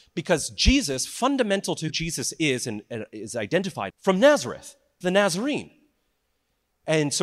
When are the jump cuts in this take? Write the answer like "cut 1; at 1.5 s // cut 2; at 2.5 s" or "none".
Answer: cut 1; at 1.9 s // cut 2; at 3.9 s // cut 3; at 5.0 s